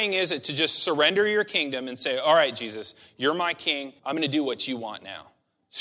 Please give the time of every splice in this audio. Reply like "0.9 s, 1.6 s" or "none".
4.0 s